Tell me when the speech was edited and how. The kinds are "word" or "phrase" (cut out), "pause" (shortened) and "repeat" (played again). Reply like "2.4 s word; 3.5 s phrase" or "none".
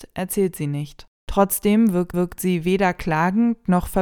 1.1 s pause; 2.1 s repeat